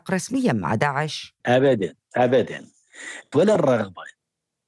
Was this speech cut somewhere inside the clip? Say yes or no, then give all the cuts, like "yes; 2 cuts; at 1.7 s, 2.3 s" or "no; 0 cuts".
yes; 2 cuts; at 1.4 s, 3.3 s